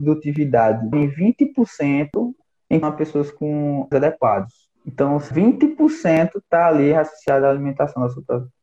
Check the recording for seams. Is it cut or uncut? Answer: cut